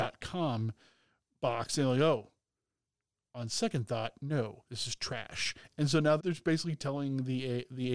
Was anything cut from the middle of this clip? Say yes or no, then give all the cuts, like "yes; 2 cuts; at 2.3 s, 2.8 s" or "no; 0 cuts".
yes; 1 cut; at 6.2 s